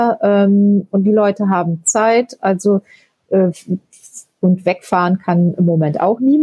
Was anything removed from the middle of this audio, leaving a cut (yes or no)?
no